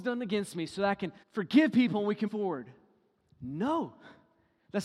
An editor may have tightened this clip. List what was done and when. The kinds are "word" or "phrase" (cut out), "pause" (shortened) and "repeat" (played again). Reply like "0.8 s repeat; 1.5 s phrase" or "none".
1.2 s pause; 2.3 s word